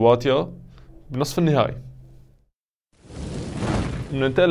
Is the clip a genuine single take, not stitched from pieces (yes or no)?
yes